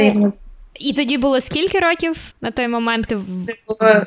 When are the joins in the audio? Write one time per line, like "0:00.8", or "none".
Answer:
0:00.9
0:02.3
0:03.1